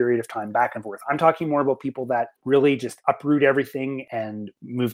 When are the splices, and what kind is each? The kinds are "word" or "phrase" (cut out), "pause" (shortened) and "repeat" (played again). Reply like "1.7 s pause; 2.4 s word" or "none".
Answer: 2.4 s pause